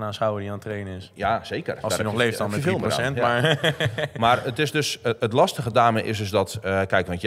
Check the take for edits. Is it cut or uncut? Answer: uncut